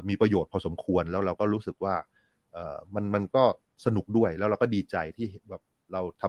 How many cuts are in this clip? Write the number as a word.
zero